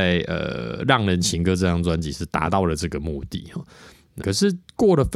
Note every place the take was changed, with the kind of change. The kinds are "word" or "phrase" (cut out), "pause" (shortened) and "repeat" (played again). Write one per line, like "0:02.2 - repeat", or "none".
0:04.2 - word

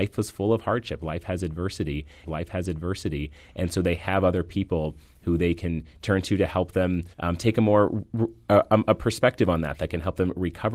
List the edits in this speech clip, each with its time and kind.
0:02.2 - repeat
0:07.1 - pause

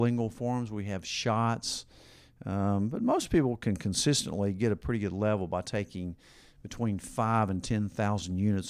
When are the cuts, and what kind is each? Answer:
none

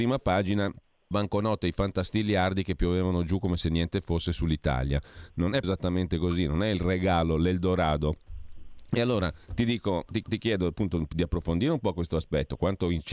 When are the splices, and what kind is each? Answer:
0:01.1 - phrase
0:05.6 - word
0:09.4 - pause
0:10.2 - repeat

